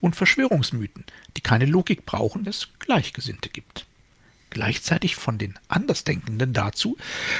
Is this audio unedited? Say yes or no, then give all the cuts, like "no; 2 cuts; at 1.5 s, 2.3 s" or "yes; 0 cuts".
no; 2 cuts; at 2.5 s, 5.2 s